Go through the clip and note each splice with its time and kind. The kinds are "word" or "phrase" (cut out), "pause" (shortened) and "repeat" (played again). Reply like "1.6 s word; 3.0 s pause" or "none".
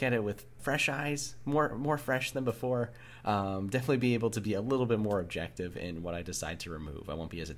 none